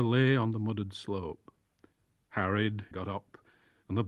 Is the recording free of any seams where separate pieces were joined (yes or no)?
no